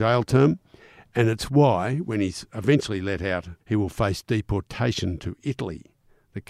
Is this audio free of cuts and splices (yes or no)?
no